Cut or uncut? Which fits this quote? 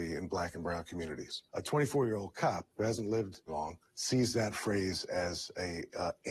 cut